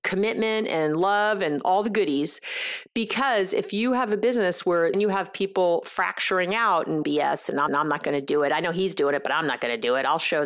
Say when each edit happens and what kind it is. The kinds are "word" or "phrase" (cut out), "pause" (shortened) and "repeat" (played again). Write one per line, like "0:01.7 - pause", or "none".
0:04.9 - word
0:07.0 - phrase
0:07.7 - repeat